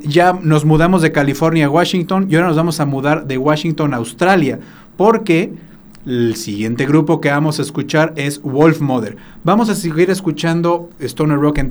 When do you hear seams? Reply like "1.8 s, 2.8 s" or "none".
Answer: none